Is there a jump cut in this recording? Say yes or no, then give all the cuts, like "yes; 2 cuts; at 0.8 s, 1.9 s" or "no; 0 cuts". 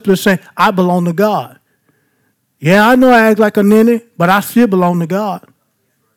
no; 0 cuts